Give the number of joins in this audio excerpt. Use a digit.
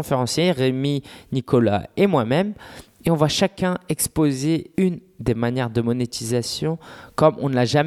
1